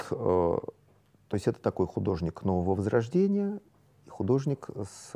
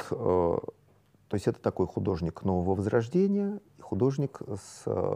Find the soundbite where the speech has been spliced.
second; 1 cut; at 3.7 s

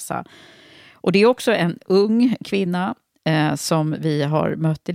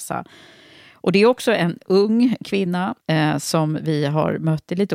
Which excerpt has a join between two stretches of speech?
second; 1 cut; at 3.0 s

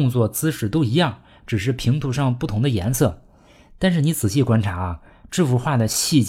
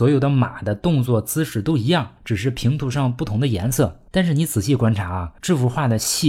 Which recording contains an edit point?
second; 3 cuts; at 2.2 s, 4.1 s, 5.4 s

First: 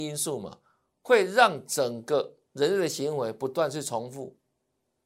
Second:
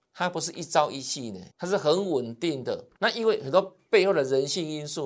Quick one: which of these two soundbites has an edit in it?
second; 2 cuts; at 1.5 s, 2.9 s

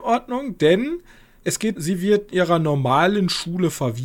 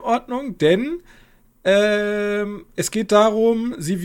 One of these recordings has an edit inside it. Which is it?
first; 3 cuts; at 1.4 s, 1.8 s, 2.3 s

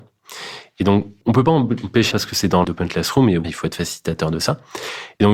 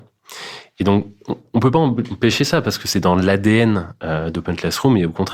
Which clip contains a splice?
first; 4 cuts; at 1.2 s, 2.1 s, 2.6 s, 3.4 s

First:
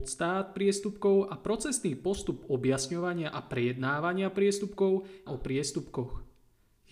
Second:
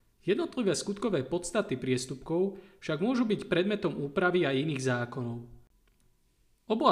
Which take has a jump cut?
first; 1 cut; at 5.3 s

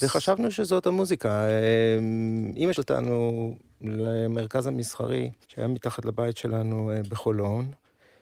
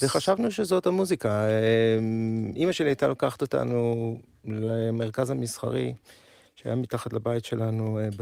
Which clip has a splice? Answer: first; 2 cuts; at 2.7 s, 5.4 s

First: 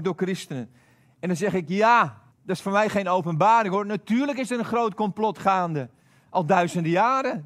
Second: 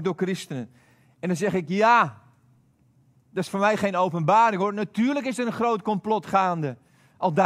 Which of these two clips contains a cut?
first; 1 cut; at 2.3 s

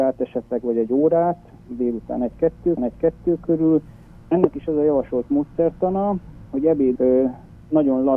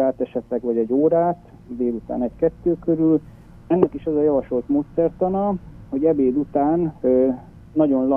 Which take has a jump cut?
first; 2 cuts; at 2.8 s, 7.0 s

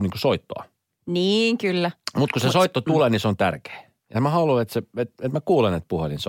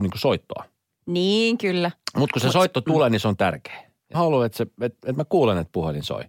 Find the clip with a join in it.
second; 1 cut; at 4.1 s

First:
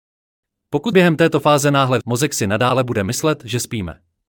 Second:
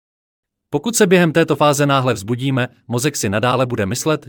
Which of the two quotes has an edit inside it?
first; 2 cuts; at 0.9 s, 2.0 s

